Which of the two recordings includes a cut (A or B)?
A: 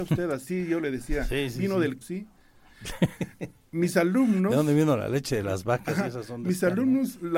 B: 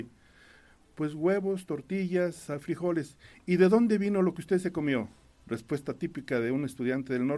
A